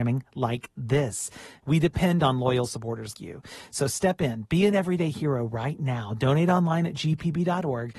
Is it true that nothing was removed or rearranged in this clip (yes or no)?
no